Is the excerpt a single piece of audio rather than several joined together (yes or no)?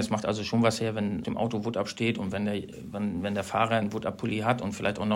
no